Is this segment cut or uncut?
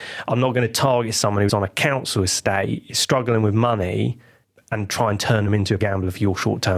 cut